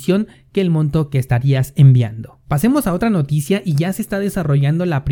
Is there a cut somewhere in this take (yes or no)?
yes